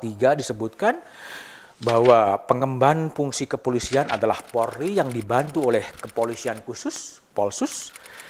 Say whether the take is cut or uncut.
uncut